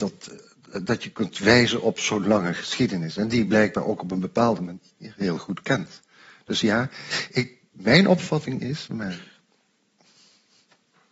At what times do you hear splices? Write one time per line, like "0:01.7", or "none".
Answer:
none